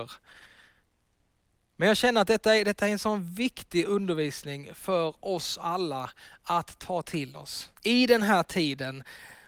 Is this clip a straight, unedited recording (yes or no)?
no